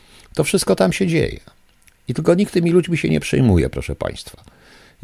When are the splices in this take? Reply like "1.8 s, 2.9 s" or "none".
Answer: none